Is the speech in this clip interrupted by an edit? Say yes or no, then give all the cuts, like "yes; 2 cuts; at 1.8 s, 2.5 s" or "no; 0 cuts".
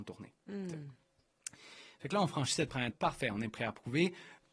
yes; 1 cut; at 2.9 s